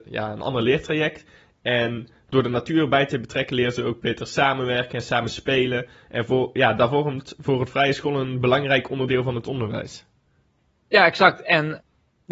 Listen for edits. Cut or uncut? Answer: uncut